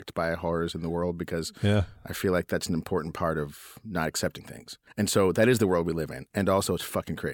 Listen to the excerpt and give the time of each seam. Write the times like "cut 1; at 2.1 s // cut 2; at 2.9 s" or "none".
cut 1; at 4.9 s

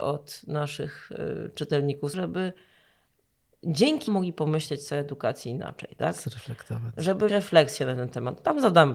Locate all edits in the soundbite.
cut 1; at 2.1 s // cut 2; at 4.1 s // cut 3; at 7.3 s

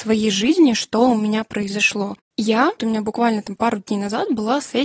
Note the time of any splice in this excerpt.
cut 1; at 2.8 s

